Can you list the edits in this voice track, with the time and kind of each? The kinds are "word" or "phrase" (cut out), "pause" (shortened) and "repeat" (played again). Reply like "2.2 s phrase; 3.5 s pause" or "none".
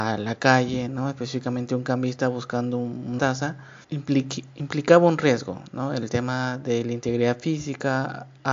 3.2 s word; 3.8 s pause

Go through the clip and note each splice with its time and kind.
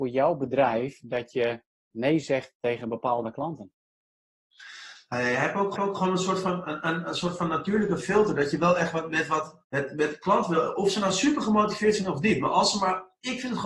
5.8 s repeat; 9.6 s pause

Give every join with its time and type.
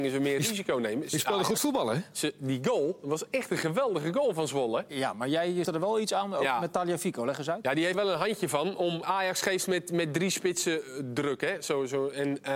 5.6 s word; 7.9 s word; 9.0 s word

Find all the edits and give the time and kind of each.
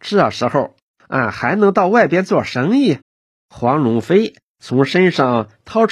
3.0 s pause

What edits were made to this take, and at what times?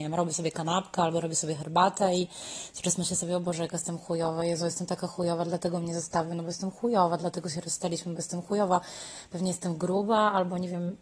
none

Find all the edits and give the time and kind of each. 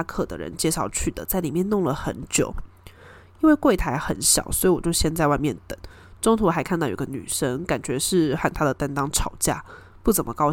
none

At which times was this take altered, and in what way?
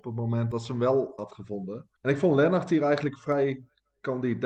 none

